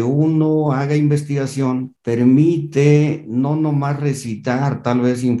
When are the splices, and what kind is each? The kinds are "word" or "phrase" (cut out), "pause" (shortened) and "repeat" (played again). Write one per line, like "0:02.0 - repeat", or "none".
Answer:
none